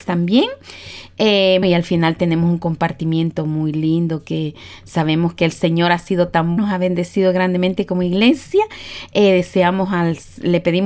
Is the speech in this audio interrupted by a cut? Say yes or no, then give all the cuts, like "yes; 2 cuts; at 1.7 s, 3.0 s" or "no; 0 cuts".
yes; 2 cuts; at 1.6 s, 6.6 s